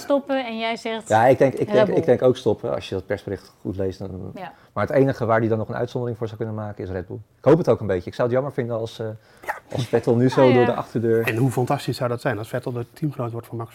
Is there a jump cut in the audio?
no; 0 cuts

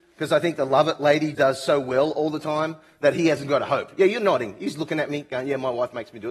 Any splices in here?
yes; 1 cut; at 1.3 s

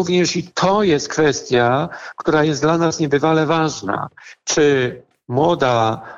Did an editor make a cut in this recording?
no; 0 cuts

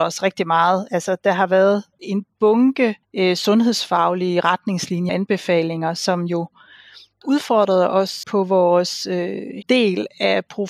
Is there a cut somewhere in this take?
yes; 6 cuts; at 2.0 s, 3.0 s, 5.1 s, 7.2 s, 8.2 s, 9.6 s

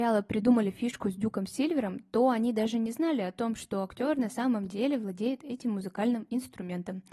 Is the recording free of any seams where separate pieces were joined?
yes; 0 cuts

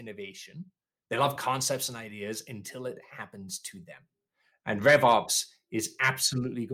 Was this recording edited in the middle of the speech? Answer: no; 0 cuts

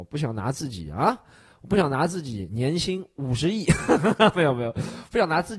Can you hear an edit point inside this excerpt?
no; 0 cuts

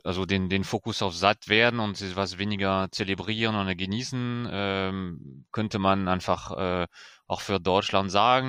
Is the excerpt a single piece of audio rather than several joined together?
yes; 0 cuts

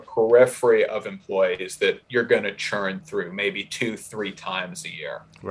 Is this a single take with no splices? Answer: yes; 0 cuts

